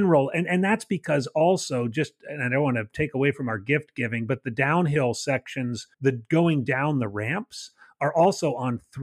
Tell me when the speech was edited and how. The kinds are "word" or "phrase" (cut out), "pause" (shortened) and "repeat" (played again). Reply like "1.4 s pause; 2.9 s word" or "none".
5.9 s pause